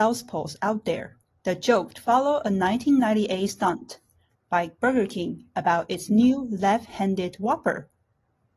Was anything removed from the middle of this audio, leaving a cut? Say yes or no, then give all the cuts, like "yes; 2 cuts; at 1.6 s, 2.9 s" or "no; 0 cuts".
no; 0 cuts